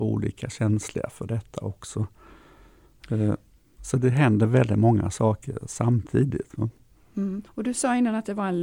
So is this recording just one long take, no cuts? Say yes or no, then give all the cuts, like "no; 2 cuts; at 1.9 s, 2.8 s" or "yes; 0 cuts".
no; 1 cut; at 7.4 s